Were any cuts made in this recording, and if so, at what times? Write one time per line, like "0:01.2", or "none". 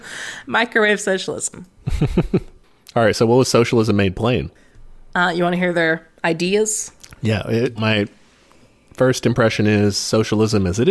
0:07.8